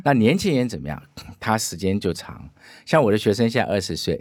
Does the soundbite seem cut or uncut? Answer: uncut